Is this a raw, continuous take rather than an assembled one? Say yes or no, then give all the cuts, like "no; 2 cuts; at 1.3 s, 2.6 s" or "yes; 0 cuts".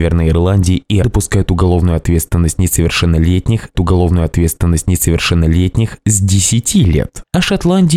no; 2 cuts; at 1.0 s, 3.7 s